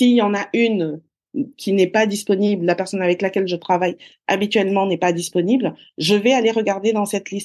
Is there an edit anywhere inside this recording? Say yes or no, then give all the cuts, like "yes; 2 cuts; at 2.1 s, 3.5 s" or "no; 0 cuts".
no; 0 cuts